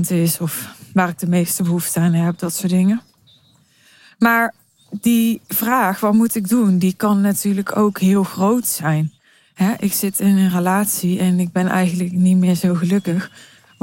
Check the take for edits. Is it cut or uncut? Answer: uncut